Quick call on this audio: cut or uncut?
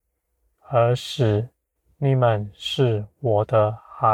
cut